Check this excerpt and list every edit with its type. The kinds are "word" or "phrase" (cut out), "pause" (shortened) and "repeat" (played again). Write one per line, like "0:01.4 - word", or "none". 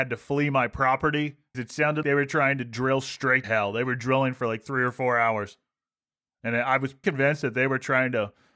0:01.5 - word
0:02.0 - word
0:03.4 - word
0:07.0 - word